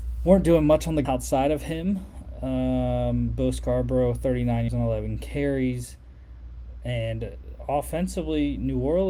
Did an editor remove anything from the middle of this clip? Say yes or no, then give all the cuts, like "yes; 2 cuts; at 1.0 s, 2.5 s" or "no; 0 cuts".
yes; 2 cuts; at 1.0 s, 4.7 s